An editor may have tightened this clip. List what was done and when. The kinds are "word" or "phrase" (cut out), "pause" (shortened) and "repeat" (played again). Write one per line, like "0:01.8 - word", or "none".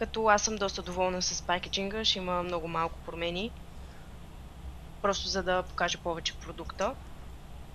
none